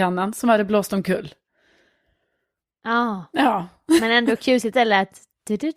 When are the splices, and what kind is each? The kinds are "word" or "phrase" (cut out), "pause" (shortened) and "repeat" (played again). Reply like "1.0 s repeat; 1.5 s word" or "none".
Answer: 4.7 s word